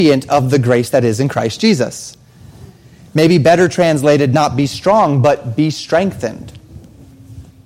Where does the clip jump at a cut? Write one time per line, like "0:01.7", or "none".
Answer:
none